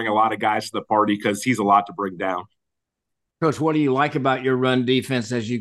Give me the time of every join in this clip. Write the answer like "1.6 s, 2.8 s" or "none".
none